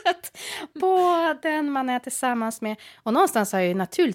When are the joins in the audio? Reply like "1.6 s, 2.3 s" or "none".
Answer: none